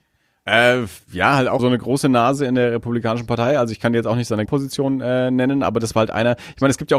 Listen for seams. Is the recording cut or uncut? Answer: cut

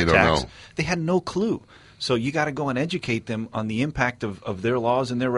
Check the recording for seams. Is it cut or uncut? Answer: uncut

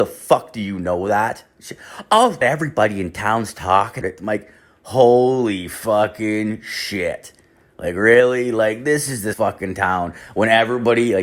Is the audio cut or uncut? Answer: cut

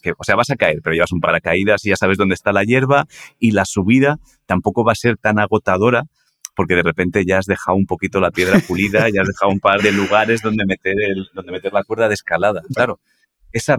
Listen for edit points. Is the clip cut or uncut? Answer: cut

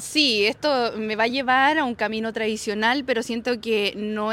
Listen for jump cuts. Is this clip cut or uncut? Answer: uncut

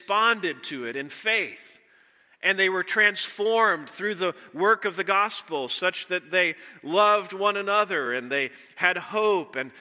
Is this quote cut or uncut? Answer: uncut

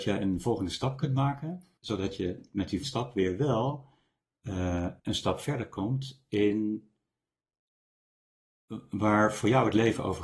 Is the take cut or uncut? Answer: cut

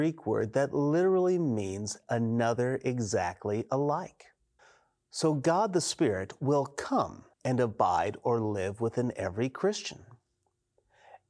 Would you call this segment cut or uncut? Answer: cut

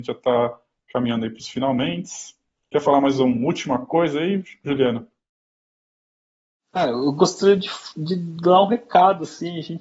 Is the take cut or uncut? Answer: uncut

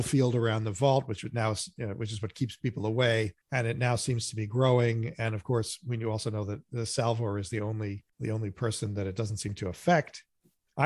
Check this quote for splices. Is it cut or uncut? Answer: cut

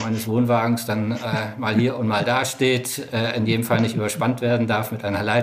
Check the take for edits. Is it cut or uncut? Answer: uncut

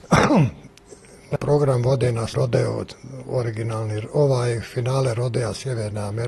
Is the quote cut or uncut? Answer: cut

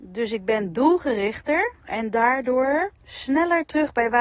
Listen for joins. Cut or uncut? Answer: cut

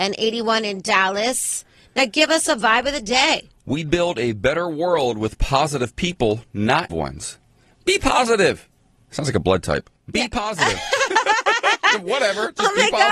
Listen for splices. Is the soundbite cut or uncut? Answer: cut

